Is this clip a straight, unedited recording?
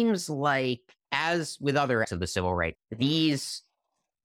no; 3 cuts; at 1.0 s, 2.0 s, 2.7 s

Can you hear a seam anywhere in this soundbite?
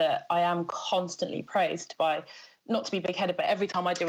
no; 0 cuts

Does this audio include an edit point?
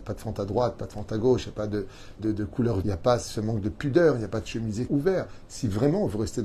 yes; 3 cuts; at 2.2 s, 2.8 s, 4.9 s

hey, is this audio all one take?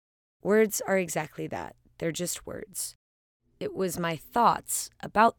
yes; 0 cuts

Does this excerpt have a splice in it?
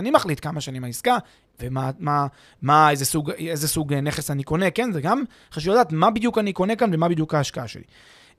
no; 0 cuts

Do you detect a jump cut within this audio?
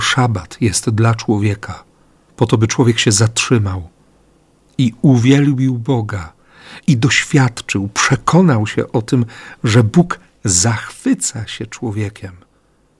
no; 0 cuts

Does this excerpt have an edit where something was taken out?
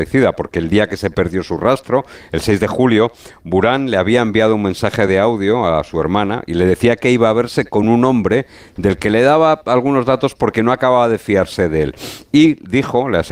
no; 0 cuts

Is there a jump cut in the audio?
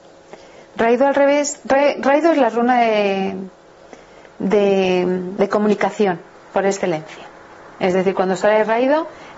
no; 0 cuts

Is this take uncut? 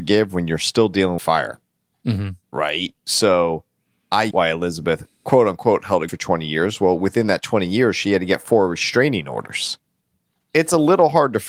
no; 5 cuts; at 1.2 s, 2.4 s, 4.3 s, 5.1 s, 6.1 s

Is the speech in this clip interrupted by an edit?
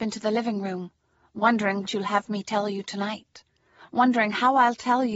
yes; 1 cut; at 1.9 s

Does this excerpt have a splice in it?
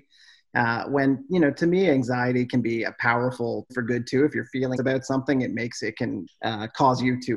yes; 3 cuts; at 3.7 s, 4.8 s, 6.3 s

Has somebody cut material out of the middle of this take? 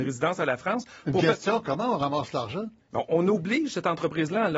yes; 1 cut; at 2.8 s

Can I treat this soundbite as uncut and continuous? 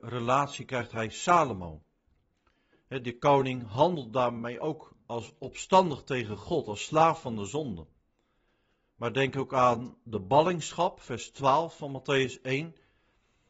yes; 0 cuts

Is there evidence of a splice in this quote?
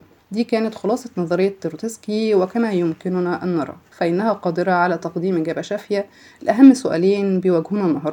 no; 0 cuts

